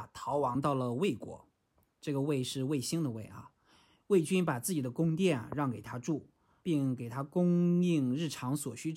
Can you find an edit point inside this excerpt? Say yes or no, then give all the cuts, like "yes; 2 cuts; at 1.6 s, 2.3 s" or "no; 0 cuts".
yes; 1 cut; at 6.6 s